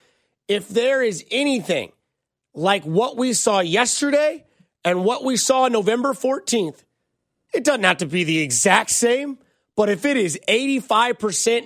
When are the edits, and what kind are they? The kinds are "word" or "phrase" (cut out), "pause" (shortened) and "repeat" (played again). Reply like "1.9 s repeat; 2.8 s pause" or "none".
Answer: none